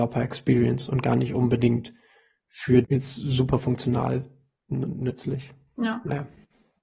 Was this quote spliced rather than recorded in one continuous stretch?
yes; 1 cut; at 2.8 s

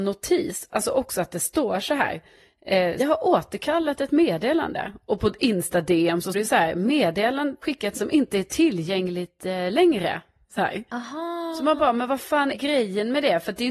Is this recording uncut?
no; 5 cuts; at 3.0 s, 6.3 s, 7.6 s, 7.9 s, 12.5 s

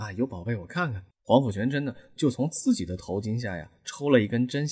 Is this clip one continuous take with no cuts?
no; 1 cut; at 1.1 s

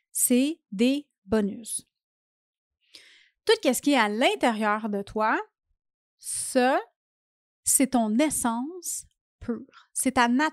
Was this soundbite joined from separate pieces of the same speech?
no; 0 cuts

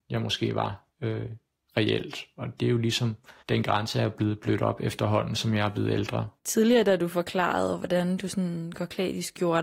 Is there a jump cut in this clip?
yes; 3 cuts; at 0.9 s, 3.4 s, 6.4 s

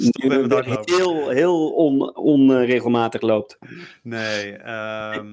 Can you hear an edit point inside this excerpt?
no; 0 cuts

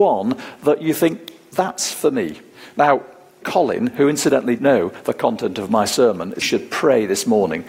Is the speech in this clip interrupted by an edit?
yes; 4 cuts; at 2.5 s, 3.4 s, 4.6 s, 6.4 s

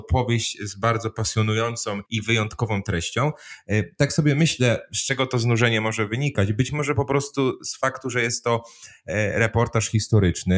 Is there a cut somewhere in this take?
yes; 1 cut; at 2.1 s

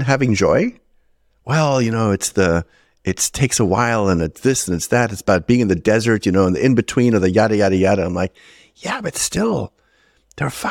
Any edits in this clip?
no; 0 cuts

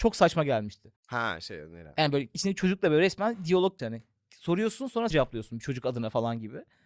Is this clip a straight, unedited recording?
no; 3 cuts; at 1.0 s, 3.8 s, 5.1 s

